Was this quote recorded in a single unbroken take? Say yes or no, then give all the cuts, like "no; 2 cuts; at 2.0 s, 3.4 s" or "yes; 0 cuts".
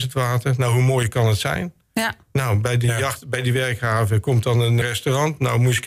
no; 1 cut; at 4.8 s